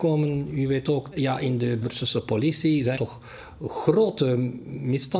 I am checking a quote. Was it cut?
yes; 3 cuts; at 1.1 s, 1.8 s, 3.0 s

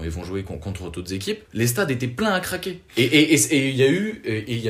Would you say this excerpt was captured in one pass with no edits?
no; 2 cuts; at 1.4 s, 2.9 s

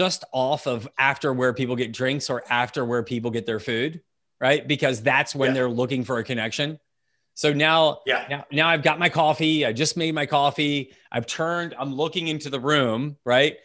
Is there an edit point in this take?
no; 0 cuts

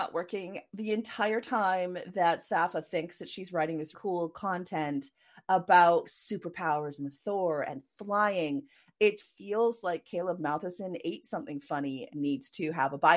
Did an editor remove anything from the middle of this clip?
yes; 4 cuts; at 3.9 s, 6.0 s, 9.2 s, 12.1 s

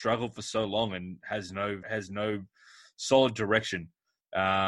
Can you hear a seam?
yes; 1 cut; at 1.8 s

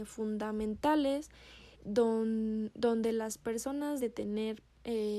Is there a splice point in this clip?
yes; 2 cuts; at 1.7 s, 4.0 s

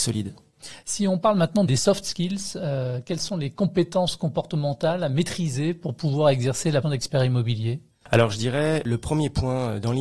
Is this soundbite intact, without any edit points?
no; 2 cuts; at 1.7 s, 6.8 s

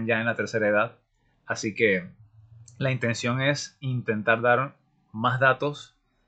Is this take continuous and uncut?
yes; 0 cuts

